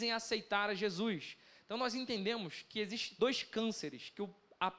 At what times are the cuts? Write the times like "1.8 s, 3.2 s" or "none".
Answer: 3.2 s

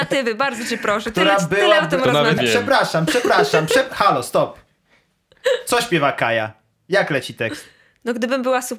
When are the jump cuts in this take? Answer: 2.4 s

